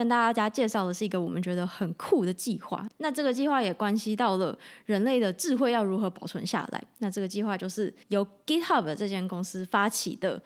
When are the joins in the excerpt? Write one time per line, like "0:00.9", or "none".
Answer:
0:08.0